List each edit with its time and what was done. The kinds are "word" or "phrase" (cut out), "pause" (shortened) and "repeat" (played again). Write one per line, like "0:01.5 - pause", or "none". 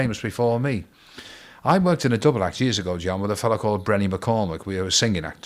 none